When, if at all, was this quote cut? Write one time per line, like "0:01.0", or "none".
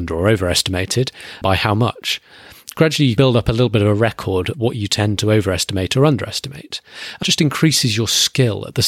0:01.4
0:03.2
0:04.5
0:07.2